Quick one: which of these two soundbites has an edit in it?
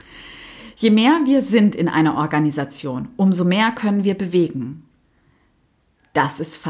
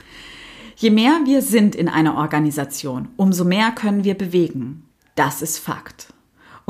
second; 1 cut; at 4.9 s

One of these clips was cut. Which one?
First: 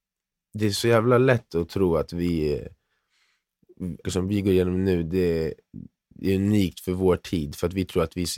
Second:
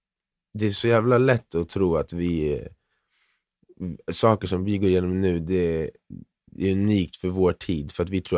first; 1 cut; at 4.0 s

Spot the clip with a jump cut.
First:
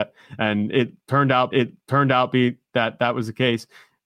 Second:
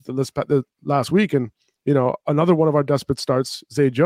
first; 1 cut; at 1.5 s

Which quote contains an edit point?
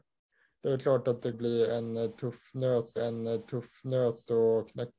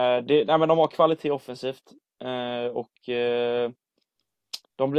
first; 2 cuts; at 1.3 s, 3.0 s

